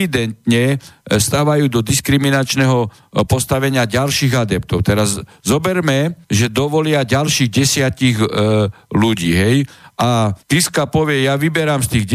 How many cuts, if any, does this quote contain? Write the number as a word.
two